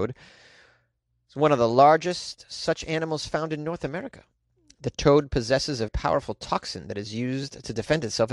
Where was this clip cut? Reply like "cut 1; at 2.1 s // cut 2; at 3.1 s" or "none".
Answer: cut 1; at 5.9 s